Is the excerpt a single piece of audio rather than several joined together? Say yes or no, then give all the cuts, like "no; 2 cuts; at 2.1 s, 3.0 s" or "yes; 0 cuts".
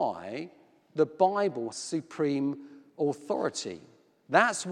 no; 1 cut; at 1.7 s